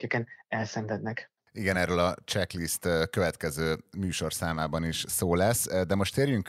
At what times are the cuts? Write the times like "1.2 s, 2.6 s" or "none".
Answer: none